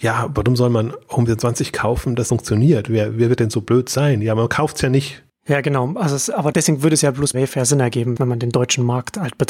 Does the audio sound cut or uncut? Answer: cut